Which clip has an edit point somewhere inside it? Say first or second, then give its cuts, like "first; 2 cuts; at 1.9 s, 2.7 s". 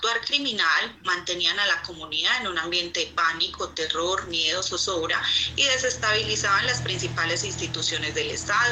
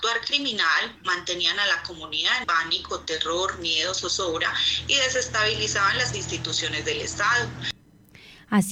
second; 2 cuts; at 2.4 s, 6.1 s